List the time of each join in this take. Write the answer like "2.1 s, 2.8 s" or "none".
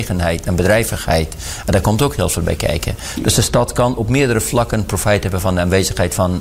none